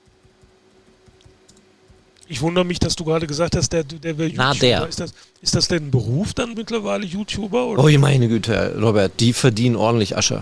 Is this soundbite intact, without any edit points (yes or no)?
no